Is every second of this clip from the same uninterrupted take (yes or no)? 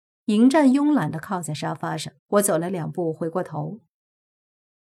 no